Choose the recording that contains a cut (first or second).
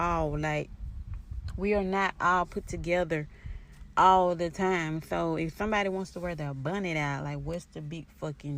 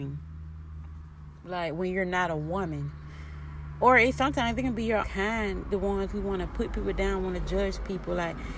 second